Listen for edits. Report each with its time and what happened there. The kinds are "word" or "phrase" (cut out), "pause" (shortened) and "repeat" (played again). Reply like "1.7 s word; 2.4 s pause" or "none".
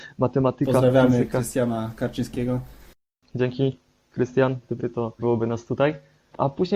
4.8 s word; 5.2 s word